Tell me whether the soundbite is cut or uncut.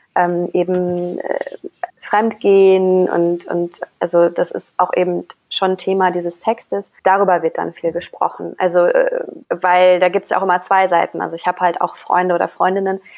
cut